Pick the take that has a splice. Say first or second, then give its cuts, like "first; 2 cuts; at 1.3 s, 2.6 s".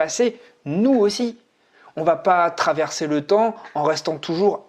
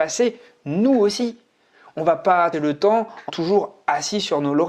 second; 2 cuts; at 2.5 s, 3.3 s